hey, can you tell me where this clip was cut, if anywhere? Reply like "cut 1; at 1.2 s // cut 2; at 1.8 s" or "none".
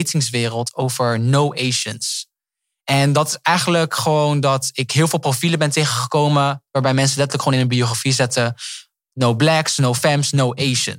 none

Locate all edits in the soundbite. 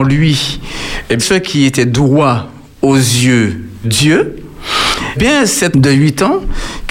cut 1; at 1.2 s // cut 2; at 3.8 s // cut 3; at 5.2 s // cut 4; at 5.7 s

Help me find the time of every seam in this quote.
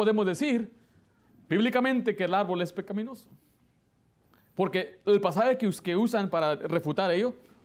none

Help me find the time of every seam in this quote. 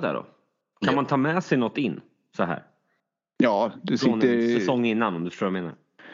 none

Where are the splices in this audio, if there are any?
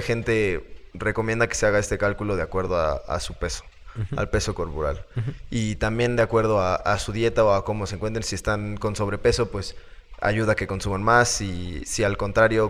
none

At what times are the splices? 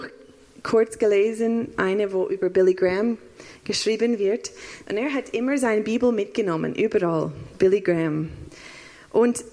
none

